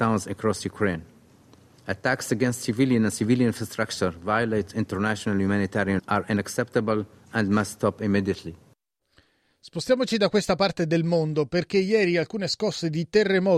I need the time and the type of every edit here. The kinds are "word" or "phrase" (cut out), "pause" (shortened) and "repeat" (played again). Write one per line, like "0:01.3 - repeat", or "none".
0:06.0 - word